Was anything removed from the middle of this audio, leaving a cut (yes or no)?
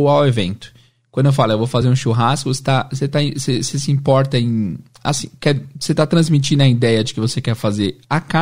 no